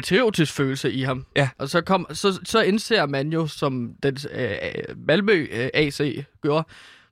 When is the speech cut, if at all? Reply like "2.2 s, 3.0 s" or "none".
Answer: none

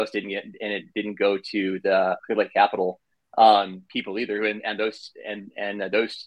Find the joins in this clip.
2.2 s

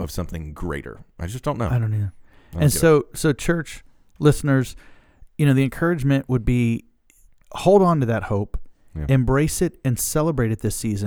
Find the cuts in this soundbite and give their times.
none

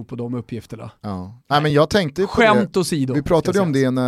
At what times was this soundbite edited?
none

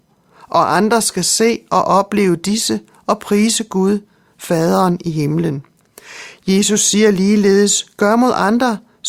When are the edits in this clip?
none

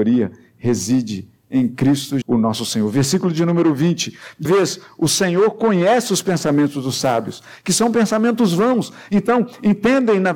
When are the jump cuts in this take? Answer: 2.2 s, 4.4 s

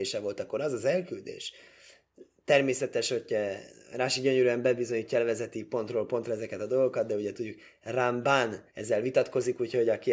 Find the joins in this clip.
8.7 s

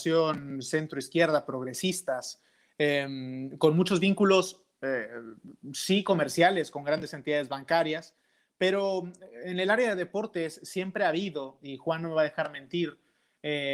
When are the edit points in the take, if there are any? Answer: none

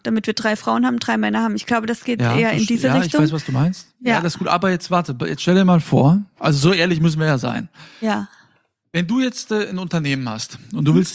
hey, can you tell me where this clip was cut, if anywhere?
none

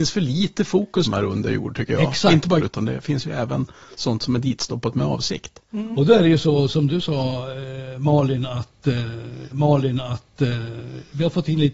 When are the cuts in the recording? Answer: 1.1 s, 2.6 s, 9.5 s

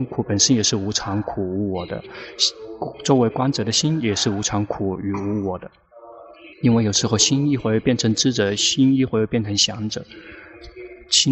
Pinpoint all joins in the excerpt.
6.5 s

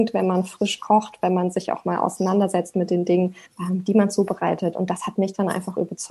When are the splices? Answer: 3.5 s

